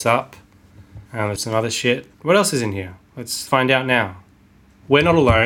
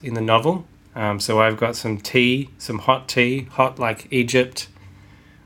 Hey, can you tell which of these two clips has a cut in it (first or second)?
first